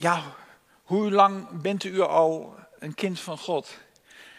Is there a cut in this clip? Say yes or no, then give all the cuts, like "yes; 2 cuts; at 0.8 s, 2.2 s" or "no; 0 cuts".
no; 0 cuts